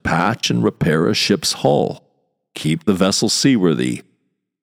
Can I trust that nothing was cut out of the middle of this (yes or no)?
yes